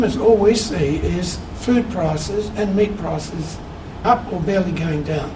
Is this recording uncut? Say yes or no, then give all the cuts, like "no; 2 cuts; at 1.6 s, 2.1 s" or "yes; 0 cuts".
no; 1 cut; at 4.0 s